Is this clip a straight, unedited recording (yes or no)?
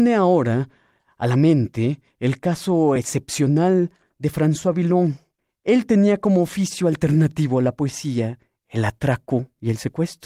yes